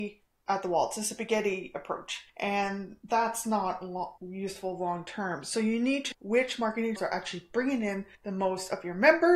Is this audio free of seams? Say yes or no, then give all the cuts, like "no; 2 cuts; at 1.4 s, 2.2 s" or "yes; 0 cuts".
no; 5 cuts; at 2.3 s, 4.2 s, 6.1 s, 7.0 s, 8.1 s